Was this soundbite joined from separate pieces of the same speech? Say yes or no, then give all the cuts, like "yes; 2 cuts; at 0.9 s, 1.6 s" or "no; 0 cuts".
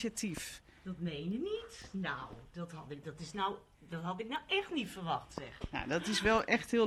no; 0 cuts